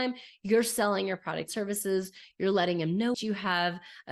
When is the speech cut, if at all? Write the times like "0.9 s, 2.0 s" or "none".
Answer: 1.5 s, 3.1 s